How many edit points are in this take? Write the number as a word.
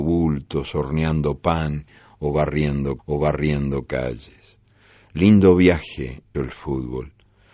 two